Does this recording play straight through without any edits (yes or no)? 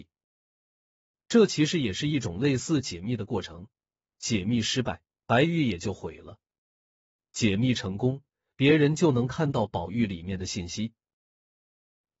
yes